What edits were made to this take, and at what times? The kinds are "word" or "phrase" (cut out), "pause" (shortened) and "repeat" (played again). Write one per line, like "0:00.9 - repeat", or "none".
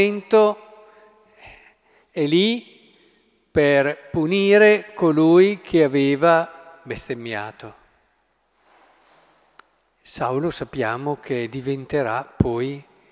none